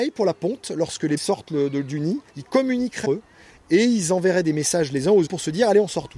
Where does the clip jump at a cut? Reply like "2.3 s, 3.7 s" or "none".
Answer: 1.2 s, 2.3 s, 3.0 s, 5.3 s